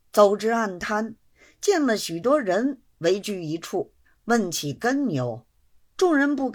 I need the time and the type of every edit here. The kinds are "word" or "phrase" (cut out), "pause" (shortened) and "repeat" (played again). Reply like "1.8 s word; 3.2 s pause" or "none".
4.0 s pause